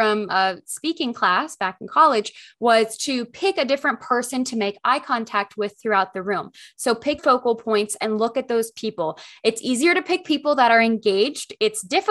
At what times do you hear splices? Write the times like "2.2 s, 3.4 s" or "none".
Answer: 7.2 s

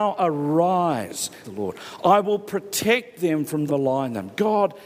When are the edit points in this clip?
1.4 s, 3.7 s

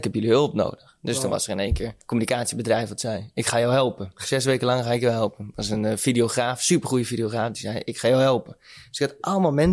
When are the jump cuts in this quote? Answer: 2.0 s

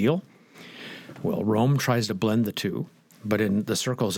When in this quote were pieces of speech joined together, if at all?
none

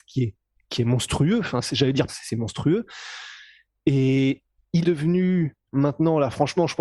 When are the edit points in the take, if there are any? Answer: 2.1 s, 4.8 s, 5.7 s

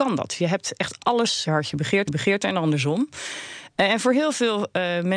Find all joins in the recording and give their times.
1.4 s, 2.1 s

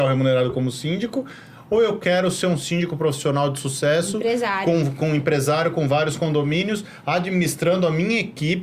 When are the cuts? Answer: none

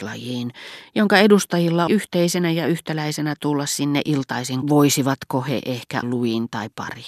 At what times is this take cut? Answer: 1.9 s, 3.4 s, 4.6 s, 6.0 s

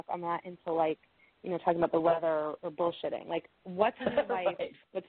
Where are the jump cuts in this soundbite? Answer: 4.0 s

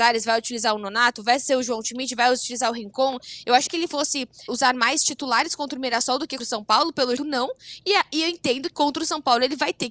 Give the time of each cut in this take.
3.7 s, 4.5 s, 6.4 s, 7.2 s, 8.7 s

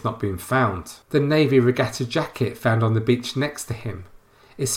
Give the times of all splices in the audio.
1.0 s

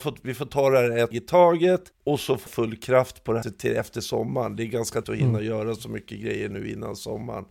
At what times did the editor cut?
1.1 s, 1.9 s, 2.5 s, 3.4 s, 5.0 s

